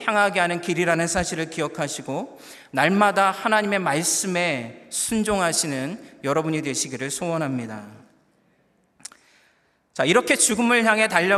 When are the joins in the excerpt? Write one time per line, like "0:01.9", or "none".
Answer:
none